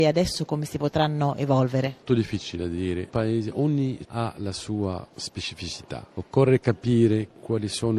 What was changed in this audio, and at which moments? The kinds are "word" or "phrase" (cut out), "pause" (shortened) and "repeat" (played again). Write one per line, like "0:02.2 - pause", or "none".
0:02.1 - word
0:03.1 - word
0:04.0 - word